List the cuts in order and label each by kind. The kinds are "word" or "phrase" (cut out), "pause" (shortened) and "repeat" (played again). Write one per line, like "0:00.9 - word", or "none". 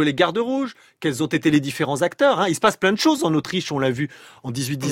none